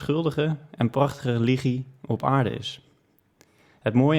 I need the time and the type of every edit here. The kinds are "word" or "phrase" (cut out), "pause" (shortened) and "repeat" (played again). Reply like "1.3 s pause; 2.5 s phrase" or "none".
none

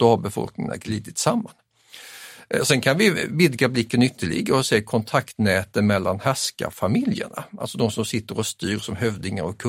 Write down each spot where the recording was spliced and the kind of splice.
none

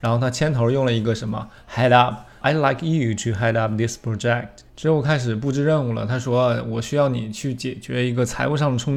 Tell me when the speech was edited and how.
4.7 s pause

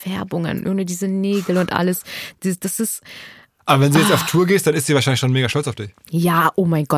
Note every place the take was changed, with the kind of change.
none

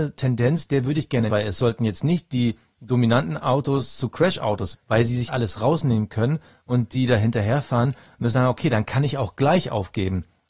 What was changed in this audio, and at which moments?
1.3 s word; 4.7 s word; 5.3 s word; 8.3 s word

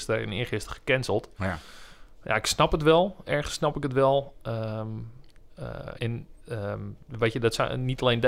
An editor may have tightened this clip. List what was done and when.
6.0 s word; 6.4 s pause

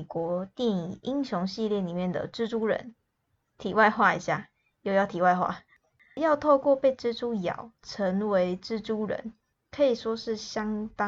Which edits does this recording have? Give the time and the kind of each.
none

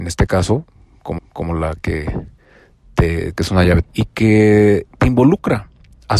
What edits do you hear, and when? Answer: 1.2 s repeat; 3.3 s phrase; 3.8 s phrase; 4.9 s pause

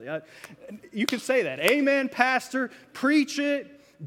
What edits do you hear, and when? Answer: none

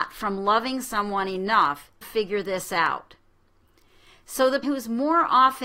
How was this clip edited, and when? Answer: 2.0 s word; 4.6 s word

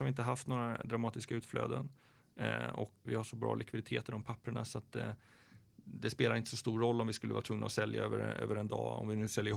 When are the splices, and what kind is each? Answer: 3.1 s word

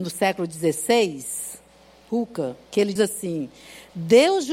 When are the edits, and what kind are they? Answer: 2.1 s word; 3.0 s word

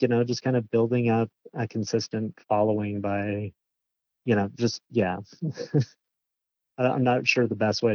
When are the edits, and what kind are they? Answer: 2.4 s pause; 4.8 s pause

